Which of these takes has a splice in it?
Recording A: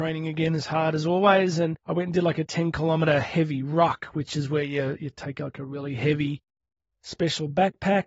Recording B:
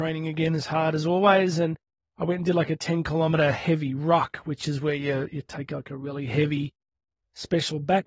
A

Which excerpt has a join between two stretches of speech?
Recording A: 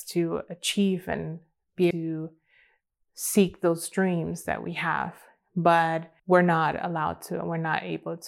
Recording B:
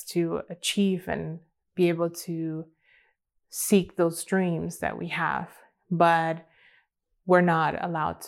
A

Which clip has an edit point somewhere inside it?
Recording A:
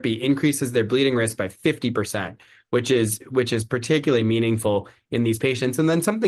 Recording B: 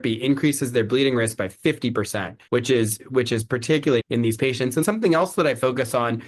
B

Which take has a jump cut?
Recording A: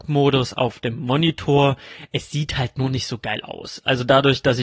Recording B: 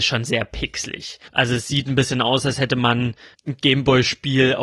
B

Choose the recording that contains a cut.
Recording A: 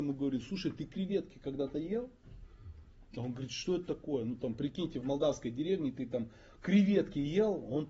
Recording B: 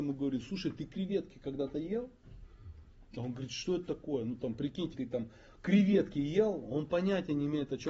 B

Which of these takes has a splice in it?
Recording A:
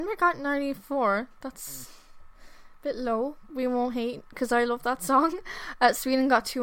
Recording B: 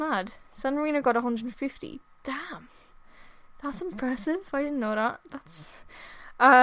A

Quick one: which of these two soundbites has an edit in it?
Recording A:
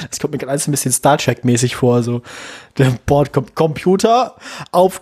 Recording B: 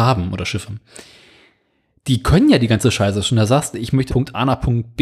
B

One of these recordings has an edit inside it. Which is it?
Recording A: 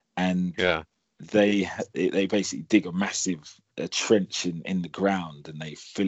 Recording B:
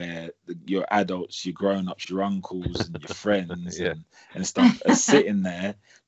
A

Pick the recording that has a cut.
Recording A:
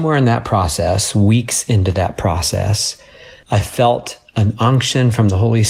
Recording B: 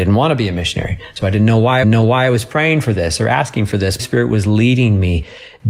B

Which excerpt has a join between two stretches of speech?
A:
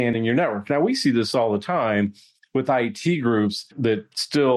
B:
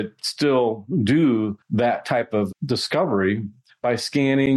B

